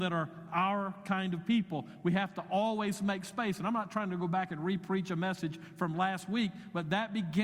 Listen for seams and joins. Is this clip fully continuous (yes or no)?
yes